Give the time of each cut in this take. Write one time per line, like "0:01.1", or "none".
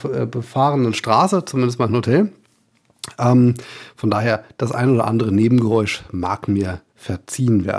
0:06.9